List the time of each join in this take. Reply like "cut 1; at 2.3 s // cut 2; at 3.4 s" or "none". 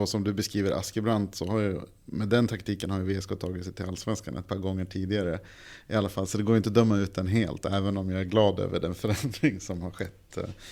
none